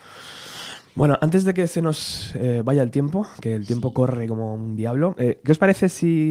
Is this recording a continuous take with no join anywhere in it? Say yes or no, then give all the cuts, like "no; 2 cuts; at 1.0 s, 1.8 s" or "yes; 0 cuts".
yes; 0 cuts